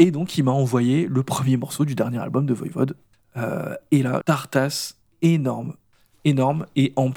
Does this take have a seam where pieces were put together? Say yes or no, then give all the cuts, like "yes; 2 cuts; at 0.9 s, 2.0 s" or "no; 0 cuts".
yes; 1 cut; at 4.2 s